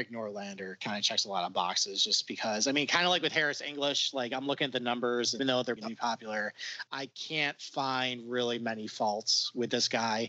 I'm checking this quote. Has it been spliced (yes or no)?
yes